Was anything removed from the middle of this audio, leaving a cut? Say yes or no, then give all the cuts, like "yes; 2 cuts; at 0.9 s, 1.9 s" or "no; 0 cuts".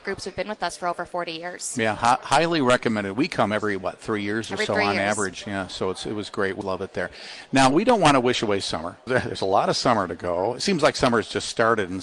yes; 2 cuts; at 6.6 s, 9.1 s